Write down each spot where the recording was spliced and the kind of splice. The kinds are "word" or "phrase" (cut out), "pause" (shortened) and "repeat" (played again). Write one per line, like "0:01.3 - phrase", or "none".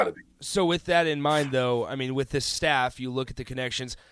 none